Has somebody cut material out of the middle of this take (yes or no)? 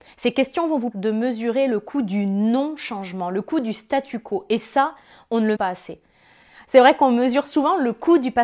yes